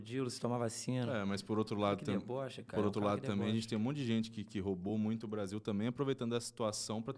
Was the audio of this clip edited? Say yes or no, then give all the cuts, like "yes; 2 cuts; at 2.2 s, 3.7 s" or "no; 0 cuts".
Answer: no; 0 cuts